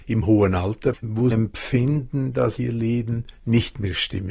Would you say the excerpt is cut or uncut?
cut